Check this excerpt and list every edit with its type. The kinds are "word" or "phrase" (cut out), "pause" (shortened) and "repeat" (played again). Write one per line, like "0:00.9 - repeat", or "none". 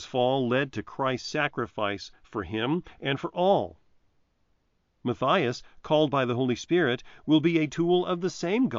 none